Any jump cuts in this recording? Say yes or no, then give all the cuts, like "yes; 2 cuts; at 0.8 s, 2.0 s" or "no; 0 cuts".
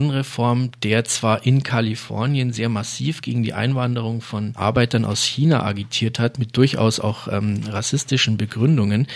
no; 0 cuts